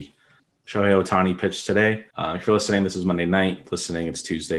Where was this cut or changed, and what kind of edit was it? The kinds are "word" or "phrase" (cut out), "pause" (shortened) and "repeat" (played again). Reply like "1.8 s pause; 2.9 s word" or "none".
2.1 s pause